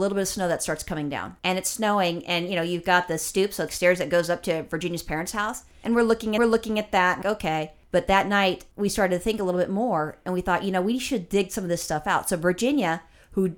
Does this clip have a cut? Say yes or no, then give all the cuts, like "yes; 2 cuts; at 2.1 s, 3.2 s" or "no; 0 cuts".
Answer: yes; 5 cuts; at 1.4 s, 3.7 s, 6.4 s, 7.2 s, 8.7 s